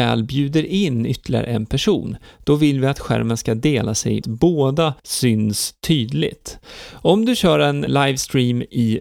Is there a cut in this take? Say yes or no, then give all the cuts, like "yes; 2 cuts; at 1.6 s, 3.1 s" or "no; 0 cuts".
yes; 3 cuts; at 4.2 s, 5.0 s, 7.9 s